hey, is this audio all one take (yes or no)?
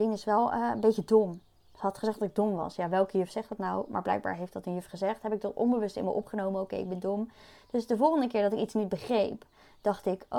yes